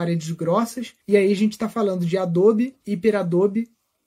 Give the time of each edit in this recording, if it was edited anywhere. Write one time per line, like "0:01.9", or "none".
0:01.0
0:02.8